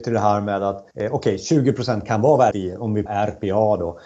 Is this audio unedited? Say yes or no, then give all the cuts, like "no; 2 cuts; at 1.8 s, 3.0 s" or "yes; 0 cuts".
no; 3 cuts; at 0.9 s, 2.5 s, 3.1 s